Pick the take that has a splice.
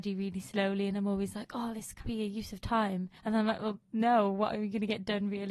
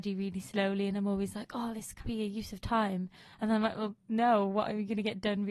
first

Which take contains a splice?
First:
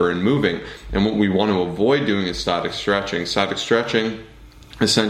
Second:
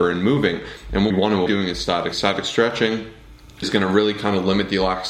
second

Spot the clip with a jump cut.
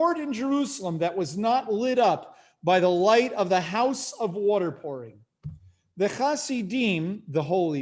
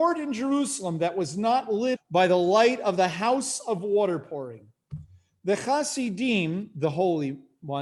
second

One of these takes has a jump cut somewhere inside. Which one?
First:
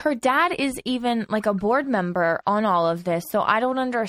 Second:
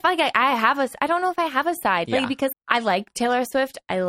second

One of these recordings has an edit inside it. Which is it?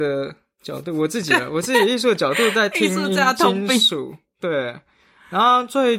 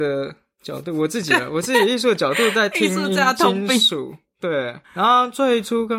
second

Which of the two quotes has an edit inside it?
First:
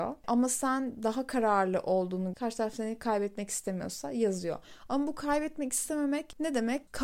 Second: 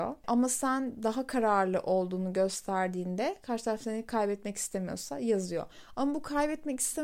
first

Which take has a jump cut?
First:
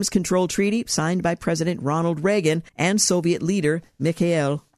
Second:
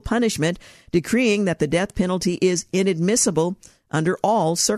first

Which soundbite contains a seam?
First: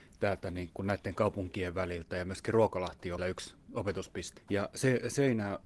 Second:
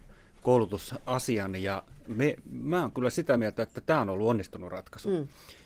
first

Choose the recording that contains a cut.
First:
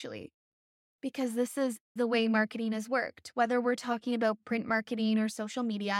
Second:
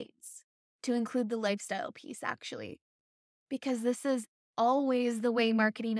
first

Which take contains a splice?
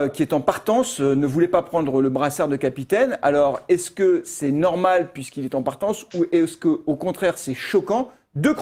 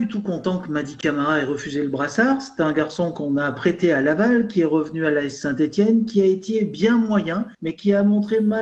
second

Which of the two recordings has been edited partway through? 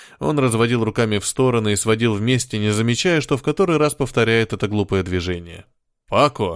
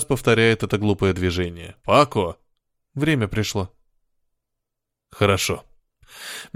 second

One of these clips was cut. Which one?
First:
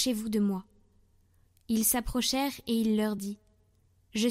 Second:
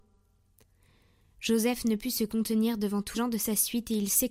second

